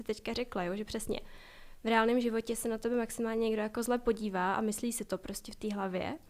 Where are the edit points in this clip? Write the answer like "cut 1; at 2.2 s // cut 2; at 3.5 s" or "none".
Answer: none